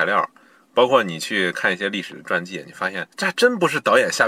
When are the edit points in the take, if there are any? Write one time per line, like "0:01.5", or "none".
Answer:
0:03.1